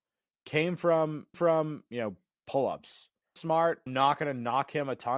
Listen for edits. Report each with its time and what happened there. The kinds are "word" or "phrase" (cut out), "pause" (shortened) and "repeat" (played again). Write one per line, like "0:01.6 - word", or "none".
0:01.3 - repeat
0:03.4 - word
0:03.9 - word